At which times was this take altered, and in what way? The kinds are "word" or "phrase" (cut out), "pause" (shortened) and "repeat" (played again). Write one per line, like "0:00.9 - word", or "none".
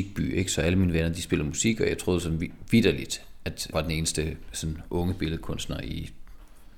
0:03.7 - word